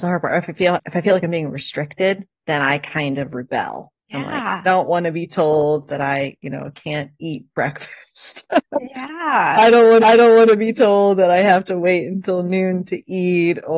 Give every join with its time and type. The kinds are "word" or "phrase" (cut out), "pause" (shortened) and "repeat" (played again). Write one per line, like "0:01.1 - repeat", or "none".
0:02.4 - pause
0:04.0 - pause
0:04.6 - word
0:10.0 - repeat